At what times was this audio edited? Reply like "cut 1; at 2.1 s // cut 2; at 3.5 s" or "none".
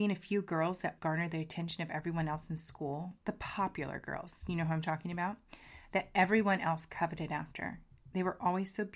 cut 1; at 1.0 s